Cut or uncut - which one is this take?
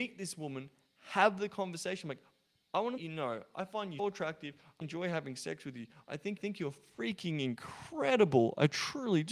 cut